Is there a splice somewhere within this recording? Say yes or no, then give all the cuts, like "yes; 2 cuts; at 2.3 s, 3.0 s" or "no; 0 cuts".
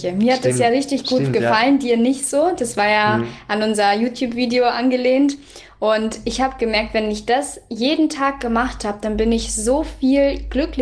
no; 0 cuts